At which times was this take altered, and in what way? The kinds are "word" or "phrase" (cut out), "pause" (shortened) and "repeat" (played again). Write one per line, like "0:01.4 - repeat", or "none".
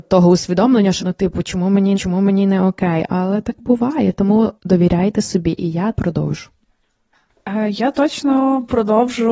0:01.0 - word
0:01.9 - repeat
0:04.6 - pause
0:05.9 - word